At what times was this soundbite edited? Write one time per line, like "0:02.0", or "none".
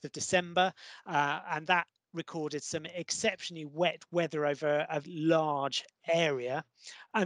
0:05.0